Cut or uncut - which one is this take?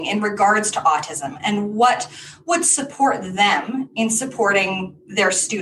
uncut